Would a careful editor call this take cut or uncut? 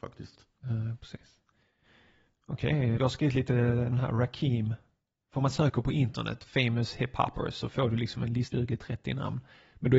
cut